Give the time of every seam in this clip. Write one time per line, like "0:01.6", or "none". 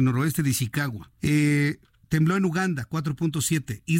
0:01.2